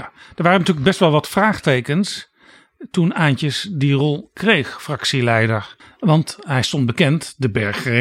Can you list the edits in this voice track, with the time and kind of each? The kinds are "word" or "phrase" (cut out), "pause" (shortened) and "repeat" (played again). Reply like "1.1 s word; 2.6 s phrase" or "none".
5.8 s pause